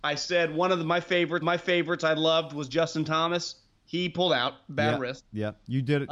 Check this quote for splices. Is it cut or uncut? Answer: cut